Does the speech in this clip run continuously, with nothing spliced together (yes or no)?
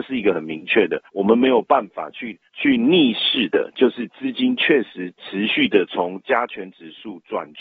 no